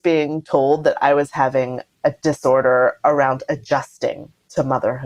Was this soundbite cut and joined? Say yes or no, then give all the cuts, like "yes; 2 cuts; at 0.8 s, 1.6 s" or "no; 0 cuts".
no; 0 cuts